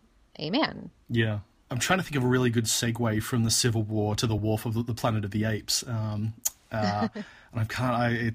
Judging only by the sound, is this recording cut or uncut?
uncut